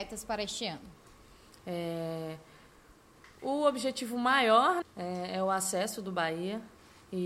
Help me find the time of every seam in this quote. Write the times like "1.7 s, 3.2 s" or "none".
4.8 s